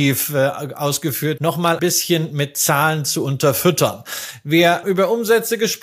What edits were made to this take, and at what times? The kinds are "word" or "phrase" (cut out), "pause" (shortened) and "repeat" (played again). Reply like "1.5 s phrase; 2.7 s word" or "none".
1.4 s word; 1.8 s word; 4.8 s word